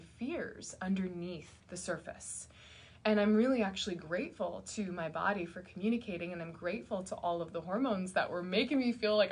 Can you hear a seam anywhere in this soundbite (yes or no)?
yes